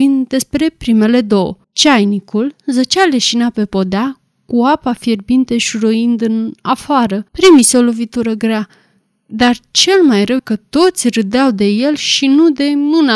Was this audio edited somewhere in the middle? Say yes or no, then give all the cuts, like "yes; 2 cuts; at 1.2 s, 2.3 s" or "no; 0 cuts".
yes; 3 cuts; at 1.6 s, 7.3 s, 10.4 s